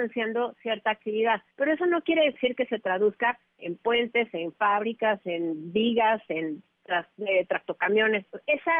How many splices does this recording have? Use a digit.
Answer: 1